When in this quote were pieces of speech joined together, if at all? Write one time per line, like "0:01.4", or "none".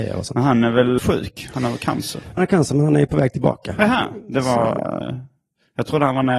0:01.0
0:02.4